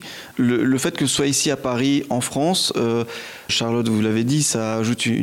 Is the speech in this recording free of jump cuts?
no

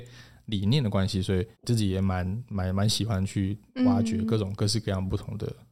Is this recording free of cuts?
no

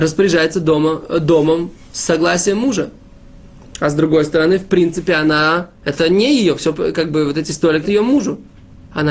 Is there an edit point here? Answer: yes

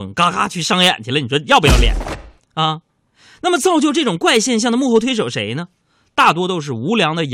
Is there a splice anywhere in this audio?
no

